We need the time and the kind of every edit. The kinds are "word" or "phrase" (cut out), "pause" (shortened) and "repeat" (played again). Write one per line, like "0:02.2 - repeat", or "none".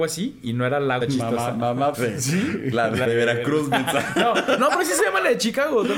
0:01.0 - word
0:01.9 - phrase
0:03.0 - phrase
0:04.6 - word